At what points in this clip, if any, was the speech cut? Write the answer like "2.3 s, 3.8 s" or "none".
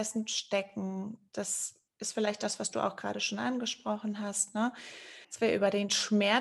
1.9 s, 5.2 s